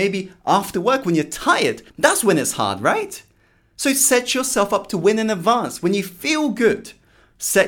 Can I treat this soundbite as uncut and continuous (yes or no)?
no